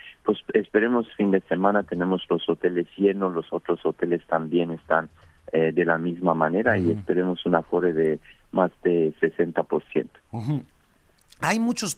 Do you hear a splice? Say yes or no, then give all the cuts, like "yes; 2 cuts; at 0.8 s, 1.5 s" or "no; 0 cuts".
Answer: no; 0 cuts